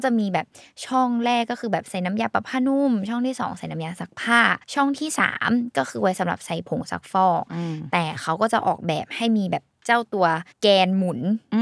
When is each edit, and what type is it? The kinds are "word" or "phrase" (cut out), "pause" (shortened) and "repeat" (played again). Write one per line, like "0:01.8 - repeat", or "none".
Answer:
0:04.6 - pause
0:10.5 - pause

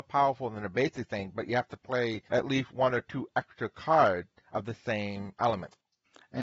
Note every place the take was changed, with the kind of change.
0:02.3 - pause

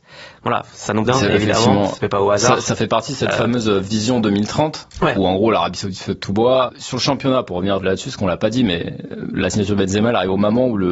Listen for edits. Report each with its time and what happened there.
0:01.1 - phrase

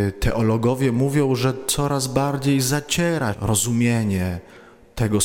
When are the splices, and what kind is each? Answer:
0:03.3 - word

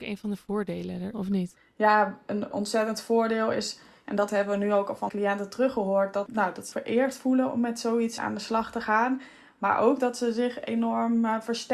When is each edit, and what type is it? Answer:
0:01.1 - word
0:02.5 - word
0:05.1 - word
0:06.3 - word
0:06.7 - word
0:08.2 - word

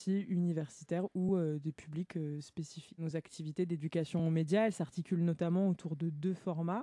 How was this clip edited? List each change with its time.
none

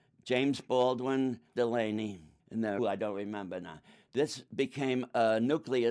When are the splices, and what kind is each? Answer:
0:01.6 - word
0:02.4 - pause
0:02.8 - phrase

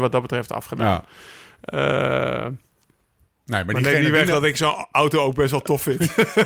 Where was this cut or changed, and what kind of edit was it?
none

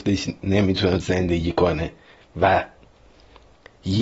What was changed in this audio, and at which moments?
0:01.0 - word

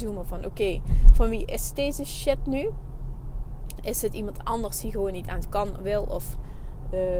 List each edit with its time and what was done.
0:05.4 - word

